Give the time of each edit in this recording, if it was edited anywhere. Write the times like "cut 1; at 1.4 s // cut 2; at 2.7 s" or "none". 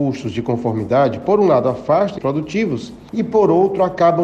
cut 1; at 2.2 s